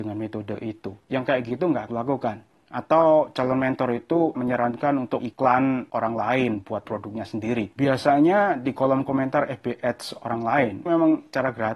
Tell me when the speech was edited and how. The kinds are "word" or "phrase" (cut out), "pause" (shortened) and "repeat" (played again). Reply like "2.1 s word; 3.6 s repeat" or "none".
1.9 s word; 4.3 s word; 5.2 s word; 6.8 s word; 10.9 s word